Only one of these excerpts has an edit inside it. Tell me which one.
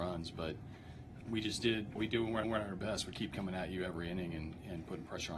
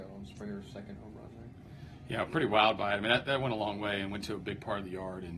first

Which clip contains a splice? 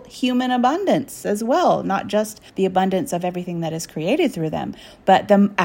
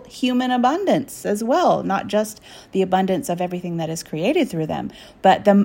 first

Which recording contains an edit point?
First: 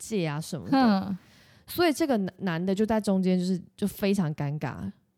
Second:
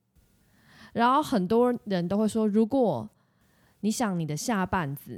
first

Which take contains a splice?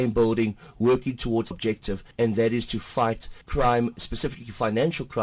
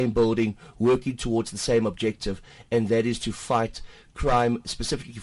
first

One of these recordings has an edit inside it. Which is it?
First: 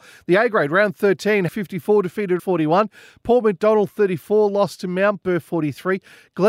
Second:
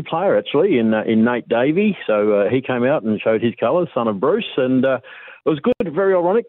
first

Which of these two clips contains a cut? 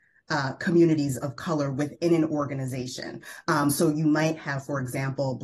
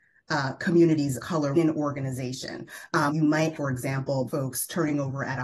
second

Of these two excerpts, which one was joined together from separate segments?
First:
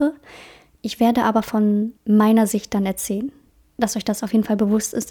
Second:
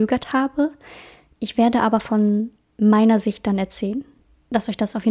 first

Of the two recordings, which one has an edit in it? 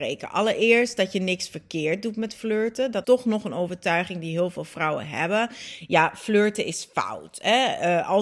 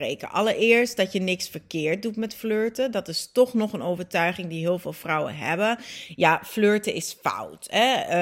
first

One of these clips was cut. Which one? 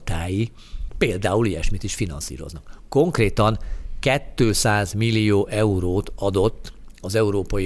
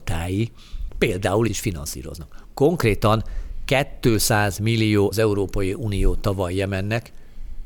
second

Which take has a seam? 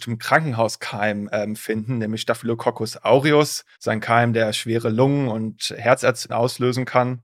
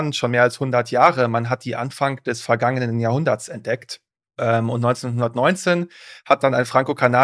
first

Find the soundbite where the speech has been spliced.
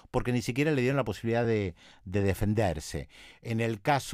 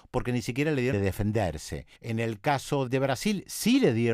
second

